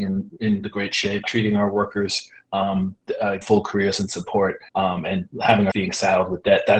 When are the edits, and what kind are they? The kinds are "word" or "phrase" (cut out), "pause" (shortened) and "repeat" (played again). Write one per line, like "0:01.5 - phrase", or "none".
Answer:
0:01.2 - word
0:03.4 - phrase
0:04.7 - pause
0:05.7 - word